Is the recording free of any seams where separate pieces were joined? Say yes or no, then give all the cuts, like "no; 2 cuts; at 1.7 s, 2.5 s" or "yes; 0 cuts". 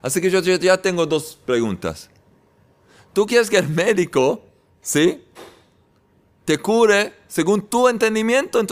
yes; 0 cuts